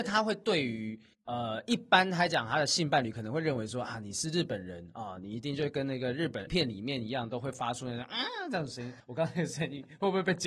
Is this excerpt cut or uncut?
cut